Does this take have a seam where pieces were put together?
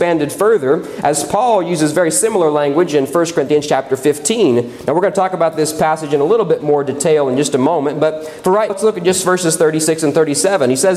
yes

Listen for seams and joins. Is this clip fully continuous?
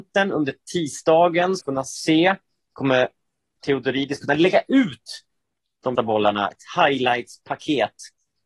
no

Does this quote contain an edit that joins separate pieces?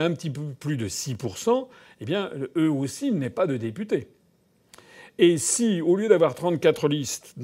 no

